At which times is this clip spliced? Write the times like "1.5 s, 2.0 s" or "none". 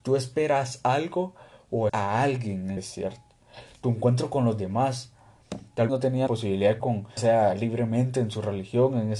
1.9 s, 2.8 s, 5.9 s, 6.3 s, 6.8 s, 7.2 s